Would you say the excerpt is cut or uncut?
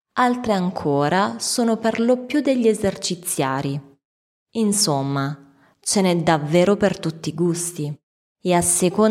uncut